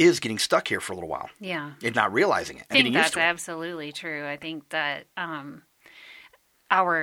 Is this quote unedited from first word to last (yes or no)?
no